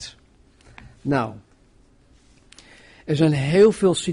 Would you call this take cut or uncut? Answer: uncut